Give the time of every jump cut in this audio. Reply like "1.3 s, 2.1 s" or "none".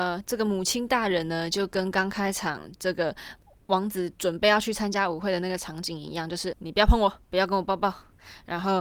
6.5 s, 7.2 s